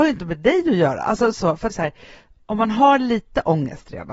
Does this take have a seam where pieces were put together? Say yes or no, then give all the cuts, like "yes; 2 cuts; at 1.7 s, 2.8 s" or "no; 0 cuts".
yes; 1 cut; at 1.7 s